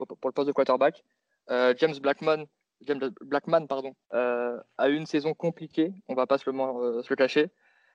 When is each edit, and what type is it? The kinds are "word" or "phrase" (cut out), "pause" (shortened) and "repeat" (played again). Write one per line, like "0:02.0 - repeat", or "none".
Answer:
0:04.0 - pause